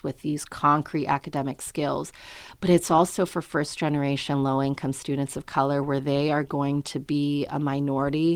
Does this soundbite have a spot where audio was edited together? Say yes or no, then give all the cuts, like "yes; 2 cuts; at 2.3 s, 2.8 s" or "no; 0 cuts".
no; 0 cuts